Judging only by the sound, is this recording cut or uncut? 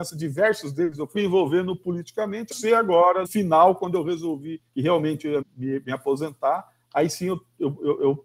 cut